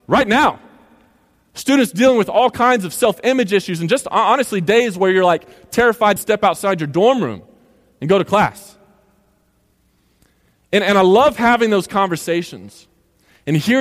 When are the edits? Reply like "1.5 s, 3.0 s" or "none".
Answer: 6.2 s